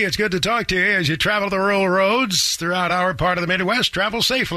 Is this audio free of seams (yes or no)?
yes